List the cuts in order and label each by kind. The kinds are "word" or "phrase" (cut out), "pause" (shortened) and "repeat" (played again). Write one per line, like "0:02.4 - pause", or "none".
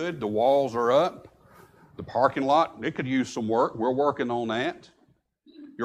none